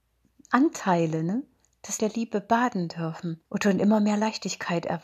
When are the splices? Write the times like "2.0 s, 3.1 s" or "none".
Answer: 2.0 s, 3.5 s